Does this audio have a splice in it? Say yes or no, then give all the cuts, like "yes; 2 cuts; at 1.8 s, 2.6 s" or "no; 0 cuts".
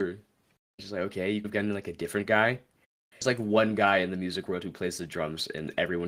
yes; 2 cuts; at 1.4 s, 2.8 s